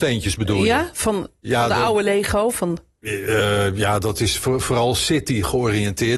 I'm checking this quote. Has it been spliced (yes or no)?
no